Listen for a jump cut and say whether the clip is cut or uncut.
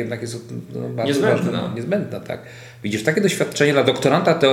uncut